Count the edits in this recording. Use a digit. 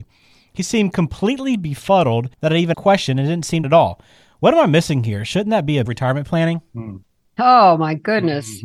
4